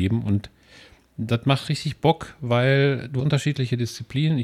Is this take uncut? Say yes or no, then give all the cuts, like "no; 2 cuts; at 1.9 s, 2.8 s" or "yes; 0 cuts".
no; 1 cut; at 3.2 s